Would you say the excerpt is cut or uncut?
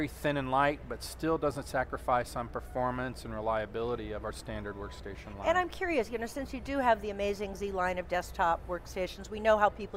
uncut